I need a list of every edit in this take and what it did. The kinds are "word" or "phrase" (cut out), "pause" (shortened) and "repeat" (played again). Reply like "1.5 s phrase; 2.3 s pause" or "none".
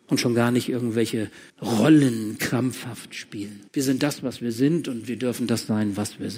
1.5 s pause; 3.7 s pause

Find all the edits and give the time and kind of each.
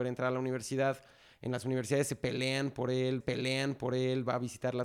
3.2 s repeat

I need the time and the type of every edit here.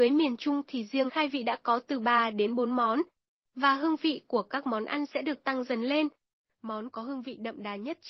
1.1 s word

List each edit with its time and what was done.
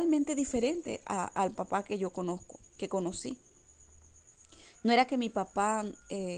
2.7 s pause

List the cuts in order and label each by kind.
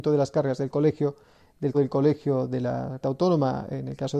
1.7 s word; 3.0 s word

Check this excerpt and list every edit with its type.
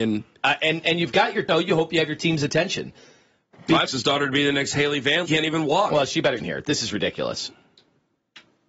1.5 s word; 3.9 s word; 5.3 s phrase; 6.4 s phrase

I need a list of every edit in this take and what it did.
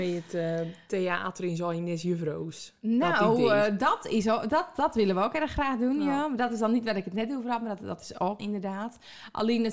8.4 s phrase

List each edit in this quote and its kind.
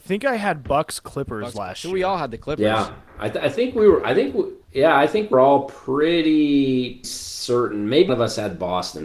4.6 s pause; 5.3 s word; 7.0 s word; 8.1 s word

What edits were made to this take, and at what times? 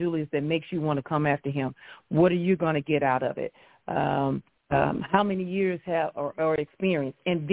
4.5 s pause

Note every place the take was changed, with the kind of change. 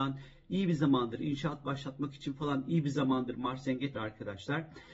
3.9 s word

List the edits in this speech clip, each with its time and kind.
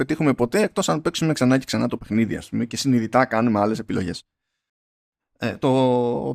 none

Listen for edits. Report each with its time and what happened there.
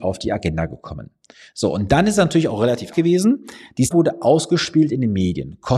2.9 s word; 3.9 s word

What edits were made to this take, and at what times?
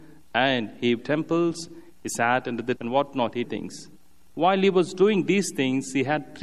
1.0 s phrase; 2.8 s word; 3.4 s phrase

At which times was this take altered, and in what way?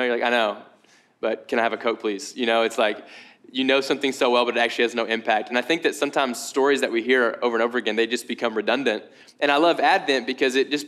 none

